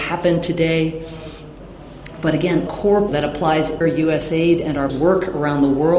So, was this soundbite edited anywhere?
yes; 4 cuts; at 2.7 s, 3.1 s, 3.8 s, 4.9 s

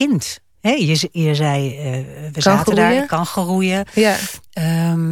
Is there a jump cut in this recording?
no; 0 cuts

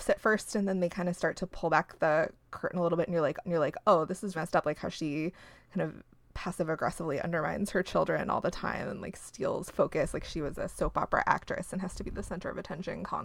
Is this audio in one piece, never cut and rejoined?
no; 2 cuts; at 3.4 s, 4.3 s

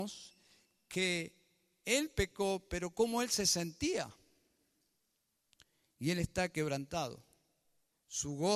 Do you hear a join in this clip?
no; 0 cuts

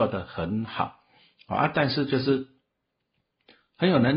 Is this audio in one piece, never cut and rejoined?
yes; 0 cuts

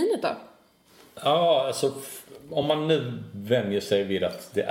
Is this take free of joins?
yes; 0 cuts

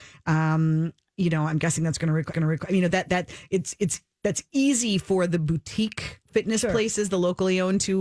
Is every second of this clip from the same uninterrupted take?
no; 1 cut; at 2.3 s

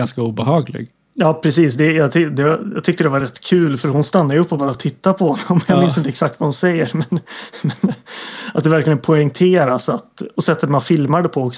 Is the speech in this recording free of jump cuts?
yes; 0 cuts

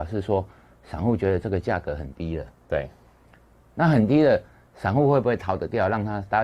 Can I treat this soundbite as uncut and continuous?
yes; 0 cuts

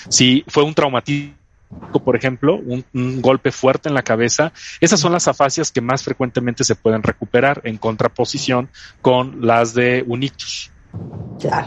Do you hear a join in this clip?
no; 0 cuts

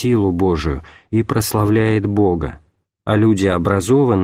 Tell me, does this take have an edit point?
yes; 1 cut; at 2.8 s

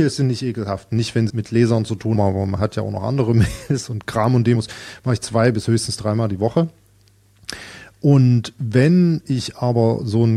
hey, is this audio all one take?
no; 3 cuts; at 1.3 s, 2.1 s, 4.5 s

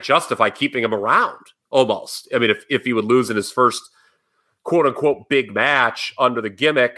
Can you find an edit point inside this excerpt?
no; 0 cuts

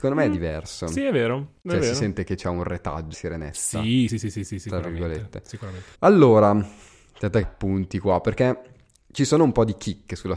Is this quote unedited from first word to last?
no; 5 cuts; at 1.6 s, 3.1 s, 4.1 s, 5.9 s, 7.4 s

